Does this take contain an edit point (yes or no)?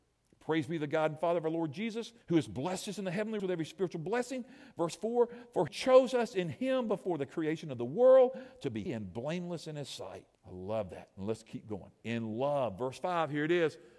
yes